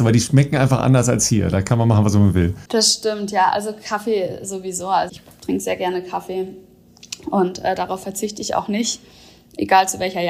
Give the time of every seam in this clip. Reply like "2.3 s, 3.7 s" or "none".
2.7 s, 5.1 s

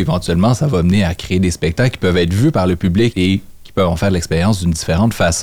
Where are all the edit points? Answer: 3.1 s

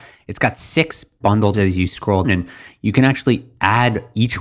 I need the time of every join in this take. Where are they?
1.2 s, 1.5 s, 2.2 s

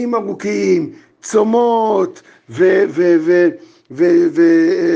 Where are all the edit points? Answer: none

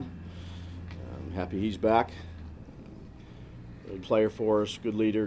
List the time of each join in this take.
4.0 s

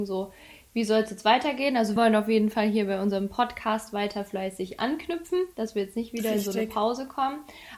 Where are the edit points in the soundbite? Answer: 2.0 s

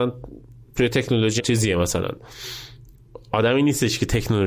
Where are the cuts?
1.4 s

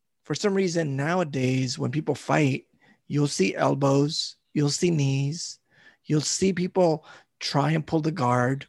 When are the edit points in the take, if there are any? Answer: none

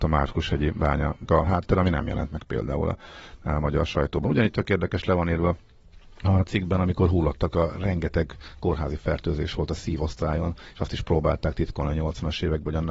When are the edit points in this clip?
1.2 s

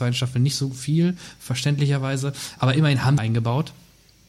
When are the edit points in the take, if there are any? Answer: 3.2 s

